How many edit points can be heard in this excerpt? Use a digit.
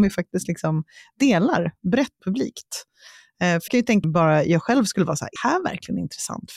4